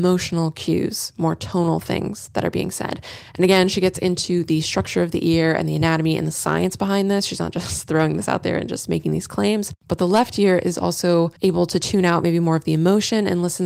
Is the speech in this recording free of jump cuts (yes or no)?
no